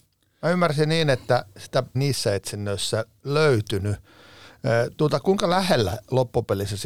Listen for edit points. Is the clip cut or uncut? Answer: cut